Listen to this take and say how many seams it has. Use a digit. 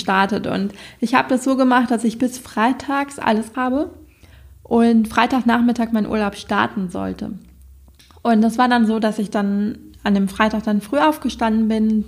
1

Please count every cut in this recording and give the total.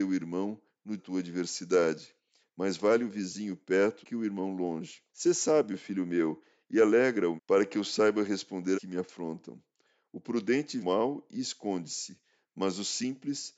6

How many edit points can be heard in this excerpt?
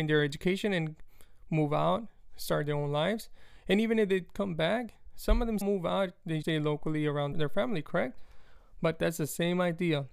3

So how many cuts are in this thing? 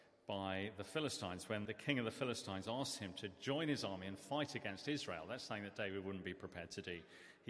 1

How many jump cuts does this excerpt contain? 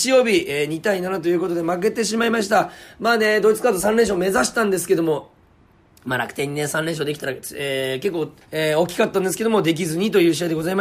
1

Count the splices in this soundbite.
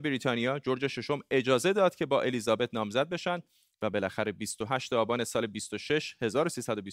0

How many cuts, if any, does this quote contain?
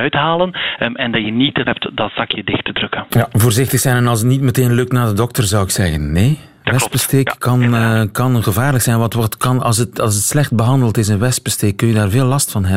1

